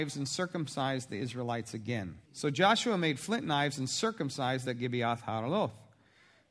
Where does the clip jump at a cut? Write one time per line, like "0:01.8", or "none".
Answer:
0:02.2
0:04.6